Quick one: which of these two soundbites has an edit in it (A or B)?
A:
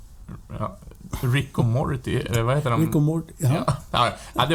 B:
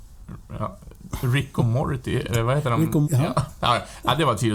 B